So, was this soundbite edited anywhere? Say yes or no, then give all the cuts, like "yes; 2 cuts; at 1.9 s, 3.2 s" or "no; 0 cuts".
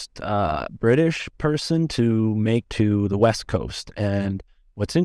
yes; 1 cut; at 2.6 s